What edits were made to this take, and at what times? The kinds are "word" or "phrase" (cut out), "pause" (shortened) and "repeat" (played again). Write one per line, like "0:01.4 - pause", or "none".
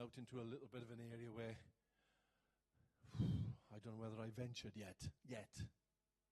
0:05.2 - pause